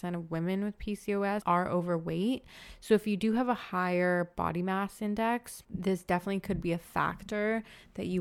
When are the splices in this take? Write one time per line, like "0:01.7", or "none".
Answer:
none